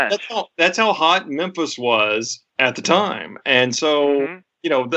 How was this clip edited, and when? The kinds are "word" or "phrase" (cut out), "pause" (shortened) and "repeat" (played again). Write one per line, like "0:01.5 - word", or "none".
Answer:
0:02.5 - pause